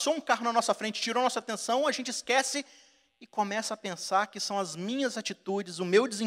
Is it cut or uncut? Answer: uncut